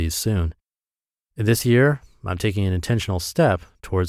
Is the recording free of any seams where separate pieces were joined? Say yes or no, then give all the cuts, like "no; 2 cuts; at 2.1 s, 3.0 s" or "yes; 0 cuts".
yes; 0 cuts